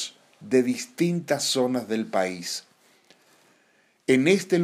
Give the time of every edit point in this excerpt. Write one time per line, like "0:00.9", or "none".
none